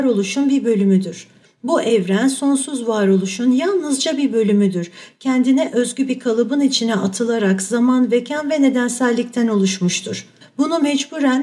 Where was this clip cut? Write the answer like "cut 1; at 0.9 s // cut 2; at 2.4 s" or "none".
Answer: cut 1; at 1.4 s // cut 2; at 10.4 s